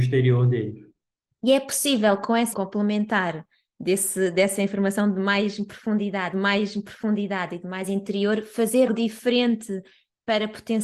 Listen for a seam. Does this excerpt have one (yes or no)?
yes